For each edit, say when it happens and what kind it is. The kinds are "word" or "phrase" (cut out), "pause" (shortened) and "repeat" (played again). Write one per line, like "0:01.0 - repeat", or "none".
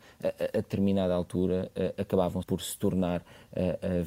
0:02.4 - word